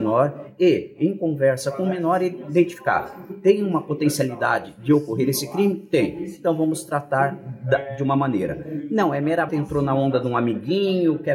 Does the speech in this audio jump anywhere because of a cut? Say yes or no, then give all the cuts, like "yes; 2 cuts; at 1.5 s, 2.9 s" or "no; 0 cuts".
yes; 1 cut; at 9.5 s